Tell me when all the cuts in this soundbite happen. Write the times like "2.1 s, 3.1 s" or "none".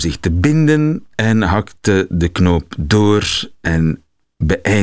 none